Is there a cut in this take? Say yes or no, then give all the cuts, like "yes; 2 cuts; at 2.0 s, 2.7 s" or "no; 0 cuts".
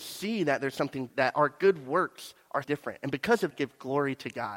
yes; 3 cuts; at 1.1 s, 2.6 s, 3.5 s